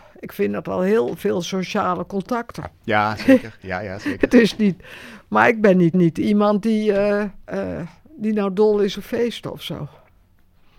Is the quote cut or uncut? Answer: cut